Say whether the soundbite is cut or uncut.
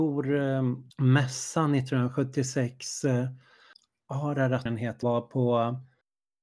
cut